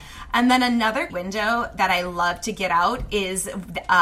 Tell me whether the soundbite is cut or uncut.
cut